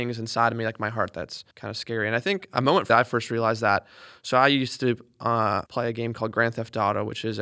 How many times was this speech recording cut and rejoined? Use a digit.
3